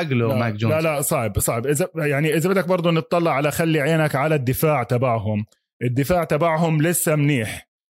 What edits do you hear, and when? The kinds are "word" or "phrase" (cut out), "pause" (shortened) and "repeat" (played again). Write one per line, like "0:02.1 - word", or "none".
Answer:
none